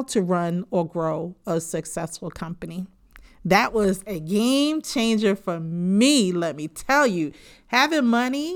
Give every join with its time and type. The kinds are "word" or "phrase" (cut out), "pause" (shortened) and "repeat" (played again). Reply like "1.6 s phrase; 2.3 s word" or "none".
none